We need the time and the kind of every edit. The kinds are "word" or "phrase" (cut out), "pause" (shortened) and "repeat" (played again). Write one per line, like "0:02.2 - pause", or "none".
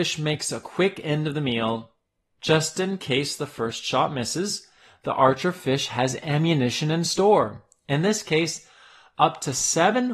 none